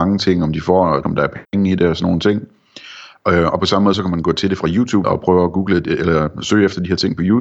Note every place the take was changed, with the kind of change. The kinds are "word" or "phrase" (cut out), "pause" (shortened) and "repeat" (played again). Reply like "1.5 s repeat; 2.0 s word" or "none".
1.0 s word; 1.4 s pause; 5.0 s word